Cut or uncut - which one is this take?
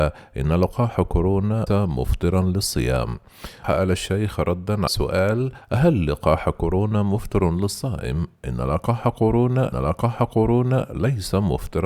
cut